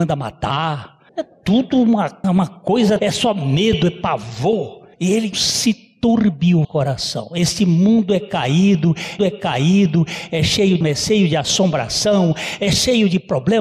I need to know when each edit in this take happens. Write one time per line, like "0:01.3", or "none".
0:01.1
0:02.2
0:03.0
0:04.9
0:05.3
0:06.6
0:09.2
0:10.8

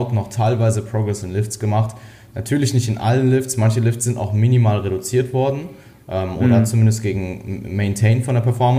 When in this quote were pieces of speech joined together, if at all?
none

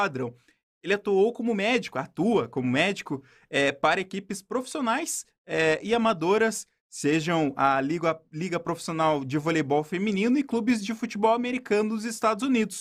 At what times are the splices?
none

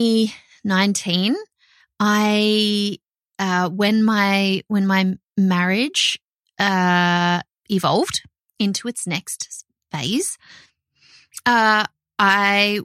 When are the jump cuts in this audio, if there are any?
none

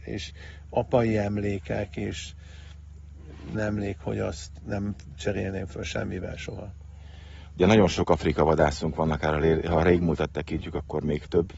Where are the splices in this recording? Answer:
0:03.5

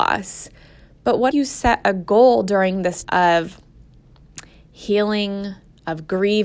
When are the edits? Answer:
0:01.3
0:03.0

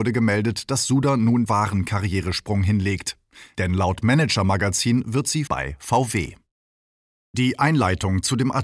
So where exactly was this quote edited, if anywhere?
0:01.5
0:05.5

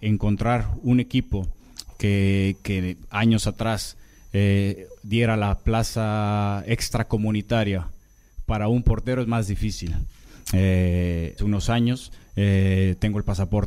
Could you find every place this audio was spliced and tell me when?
0:11.4

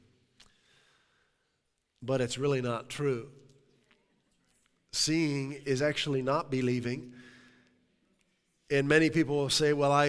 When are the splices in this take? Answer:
none

